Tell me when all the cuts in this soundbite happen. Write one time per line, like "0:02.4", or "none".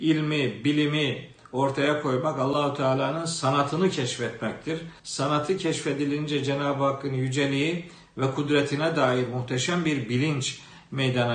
0:05.0